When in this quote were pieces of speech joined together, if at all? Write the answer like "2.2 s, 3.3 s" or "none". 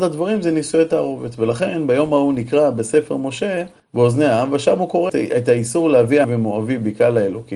3.8 s, 5.1 s, 6.2 s